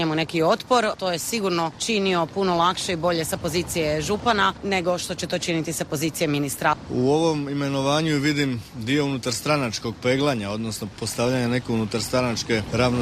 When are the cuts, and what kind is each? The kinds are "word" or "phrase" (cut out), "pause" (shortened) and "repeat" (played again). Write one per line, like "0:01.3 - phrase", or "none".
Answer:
0:08.7 - pause